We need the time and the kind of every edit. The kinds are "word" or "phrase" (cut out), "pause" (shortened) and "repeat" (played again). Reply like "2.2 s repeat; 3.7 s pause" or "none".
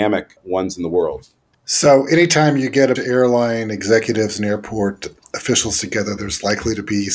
3.0 s word

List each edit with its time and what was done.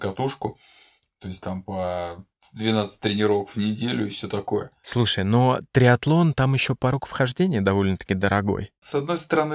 none

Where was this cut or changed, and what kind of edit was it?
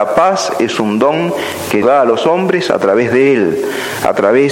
1.8 s word

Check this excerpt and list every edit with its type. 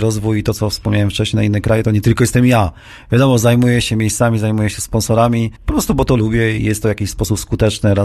5.6 s pause; 6.6 s word

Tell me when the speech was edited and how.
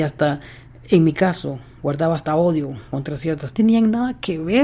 3.5 s phrase

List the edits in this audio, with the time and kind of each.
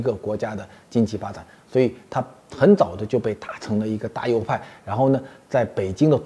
none

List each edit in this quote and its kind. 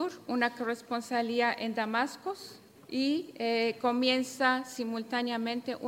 2.7 s pause

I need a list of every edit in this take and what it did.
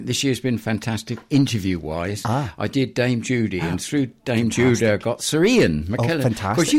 none

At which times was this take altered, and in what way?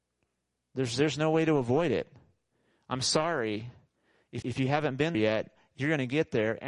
4.4 s word; 5.1 s word

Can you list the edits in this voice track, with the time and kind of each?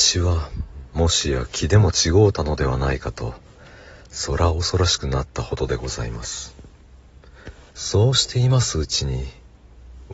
7.7 s pause

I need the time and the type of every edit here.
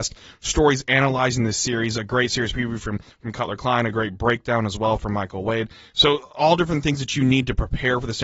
none

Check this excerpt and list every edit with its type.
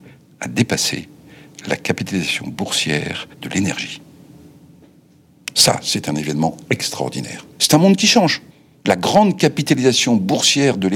3.3 s pause; 7.5 s pause; 8.5 s pause

